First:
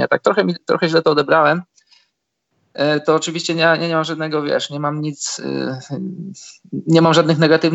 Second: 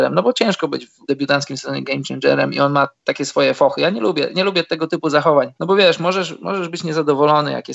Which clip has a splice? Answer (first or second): second